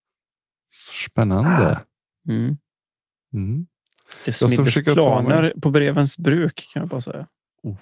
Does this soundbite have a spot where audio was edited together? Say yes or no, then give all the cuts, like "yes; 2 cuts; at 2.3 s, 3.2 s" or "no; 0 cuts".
no; 0 cuts